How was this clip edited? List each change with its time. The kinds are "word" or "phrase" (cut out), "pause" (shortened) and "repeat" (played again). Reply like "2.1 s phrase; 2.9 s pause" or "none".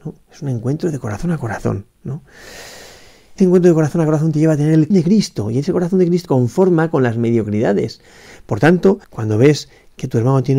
3.4 s phrase; 4.9 s word; 6.3 s phrase; 9.0 s pause